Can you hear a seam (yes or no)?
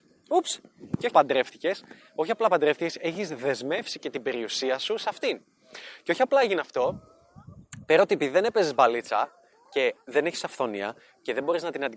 yes